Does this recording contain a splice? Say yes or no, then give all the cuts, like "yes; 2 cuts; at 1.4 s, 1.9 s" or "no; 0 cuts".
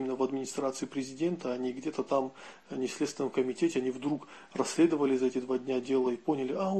no; 0 cuts